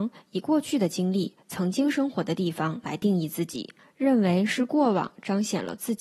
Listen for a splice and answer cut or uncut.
uncut